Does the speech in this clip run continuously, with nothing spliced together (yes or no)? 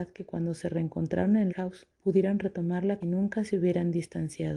no